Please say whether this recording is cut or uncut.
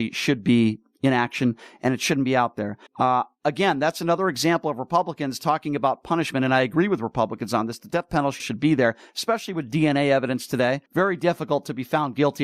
cut